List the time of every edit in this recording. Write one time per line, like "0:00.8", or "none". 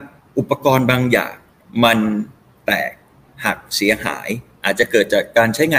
none